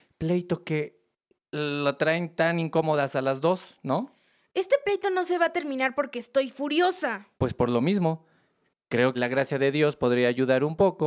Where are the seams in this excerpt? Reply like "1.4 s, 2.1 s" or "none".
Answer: 7.3 s, 9.1 s